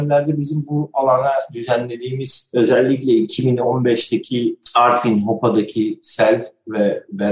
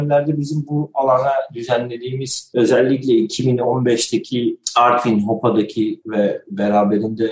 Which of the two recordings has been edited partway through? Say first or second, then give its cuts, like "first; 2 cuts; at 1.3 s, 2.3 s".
second; 1 cut; at 6.0 s